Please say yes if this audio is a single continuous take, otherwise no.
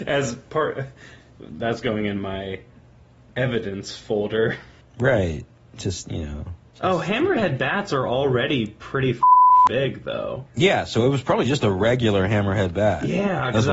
yes